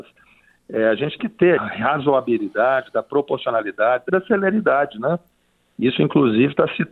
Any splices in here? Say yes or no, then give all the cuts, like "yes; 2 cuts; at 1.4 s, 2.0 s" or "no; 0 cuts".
yes; 3 cuts; at 1.2 s, 1.6 s, 4.1 s